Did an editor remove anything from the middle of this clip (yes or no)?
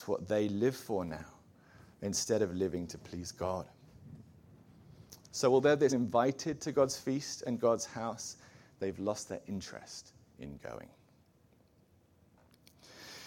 yes